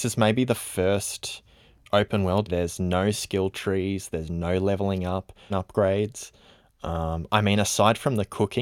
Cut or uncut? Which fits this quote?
cut